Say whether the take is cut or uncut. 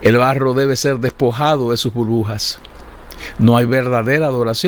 uncut